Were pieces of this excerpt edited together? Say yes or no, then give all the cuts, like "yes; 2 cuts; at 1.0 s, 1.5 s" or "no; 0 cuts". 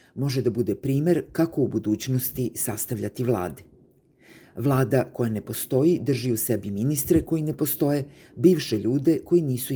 no; 0 cuts